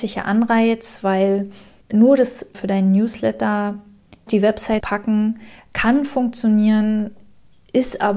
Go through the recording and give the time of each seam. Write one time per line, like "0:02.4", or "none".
0:01.8
0:02.5
0:04.3
0:04.8